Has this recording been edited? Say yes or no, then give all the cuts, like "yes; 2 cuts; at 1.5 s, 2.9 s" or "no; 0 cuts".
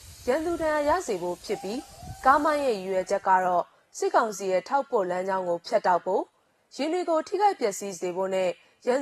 no; 0 cuts